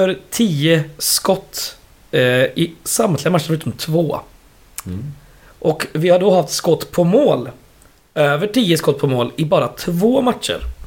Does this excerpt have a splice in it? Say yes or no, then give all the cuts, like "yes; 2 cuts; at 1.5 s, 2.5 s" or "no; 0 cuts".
no; 0 cuts